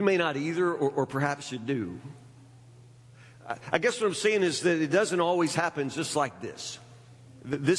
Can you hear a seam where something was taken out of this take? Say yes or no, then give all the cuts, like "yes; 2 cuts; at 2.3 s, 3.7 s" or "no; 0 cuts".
no; 0 cuts